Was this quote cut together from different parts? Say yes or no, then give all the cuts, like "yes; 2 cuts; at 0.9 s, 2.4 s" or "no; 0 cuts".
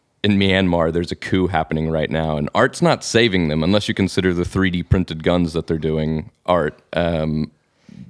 no; 0 cuts